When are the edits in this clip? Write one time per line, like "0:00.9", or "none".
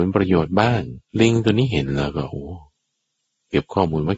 0:01.1